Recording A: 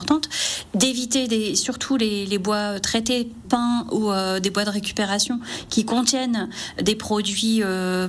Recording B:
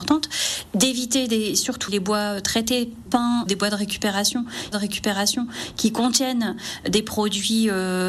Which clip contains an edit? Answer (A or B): B